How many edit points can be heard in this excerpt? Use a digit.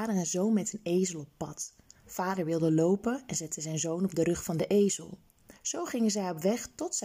0